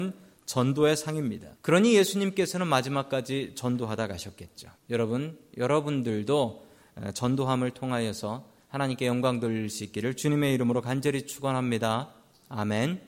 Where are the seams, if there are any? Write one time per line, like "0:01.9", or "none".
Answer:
0:01.6
0:04.8